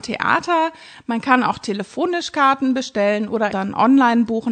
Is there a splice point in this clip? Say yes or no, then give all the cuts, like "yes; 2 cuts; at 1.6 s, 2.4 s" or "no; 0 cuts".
yes; 1 cut; at 3.5 s